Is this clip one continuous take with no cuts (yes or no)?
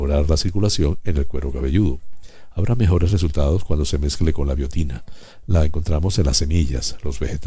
yes